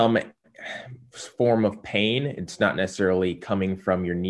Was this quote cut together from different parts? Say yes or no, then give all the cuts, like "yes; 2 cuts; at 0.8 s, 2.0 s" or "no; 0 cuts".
no; 0 cuts